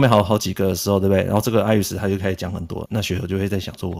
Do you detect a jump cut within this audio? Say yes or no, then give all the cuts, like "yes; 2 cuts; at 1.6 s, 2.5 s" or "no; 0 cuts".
yes; 1 cut; at 2.9 s